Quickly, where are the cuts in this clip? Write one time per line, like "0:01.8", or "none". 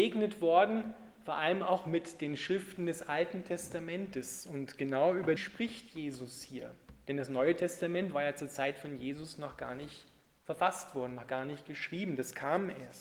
0:05.4